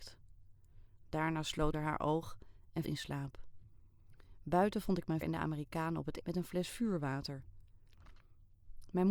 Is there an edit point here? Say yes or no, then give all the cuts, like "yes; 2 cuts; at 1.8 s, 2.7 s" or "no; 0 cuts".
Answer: yes; 4 cuts; at 1.7 s, 2.8 s, 5.2 s, 6.2 s